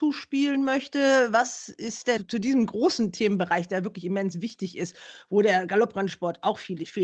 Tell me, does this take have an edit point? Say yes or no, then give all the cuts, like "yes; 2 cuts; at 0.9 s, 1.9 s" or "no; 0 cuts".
no; 0 cuts